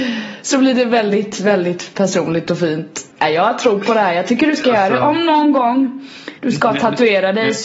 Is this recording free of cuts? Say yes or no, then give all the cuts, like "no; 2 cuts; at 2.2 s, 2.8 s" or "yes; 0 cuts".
no; 2 cuts; at 3.1 s, 6.4 s